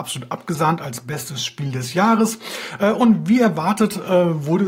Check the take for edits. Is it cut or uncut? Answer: uncut